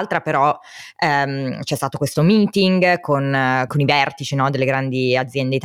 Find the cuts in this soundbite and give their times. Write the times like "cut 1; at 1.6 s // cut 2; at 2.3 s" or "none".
cut 1; at 3.7 s